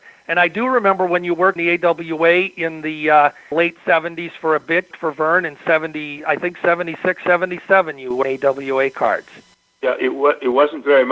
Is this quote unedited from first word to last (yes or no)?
no